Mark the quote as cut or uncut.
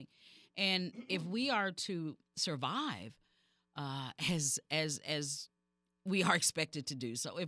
uncut